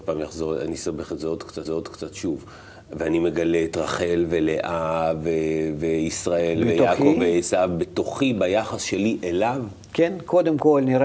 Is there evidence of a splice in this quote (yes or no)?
yes